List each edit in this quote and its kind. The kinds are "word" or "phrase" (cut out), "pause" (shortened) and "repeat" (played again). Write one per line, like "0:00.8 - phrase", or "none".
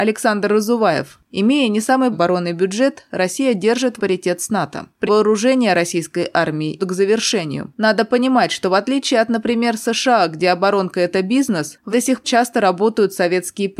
0:02.1 - word
0:04.0 - word
0:05.1 - word
0:06.8 - word
0:11.9 - word
0:12.2 - word